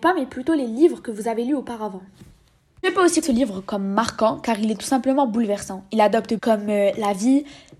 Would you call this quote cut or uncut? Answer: cut